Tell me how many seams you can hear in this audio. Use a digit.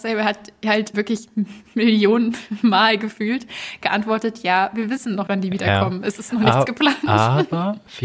2